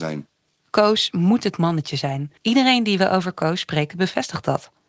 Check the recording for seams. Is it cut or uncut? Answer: cut